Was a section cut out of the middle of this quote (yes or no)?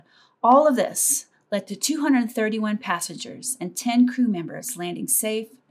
no